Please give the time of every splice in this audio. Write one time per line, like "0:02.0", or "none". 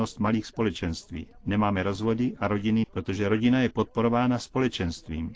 0:02.8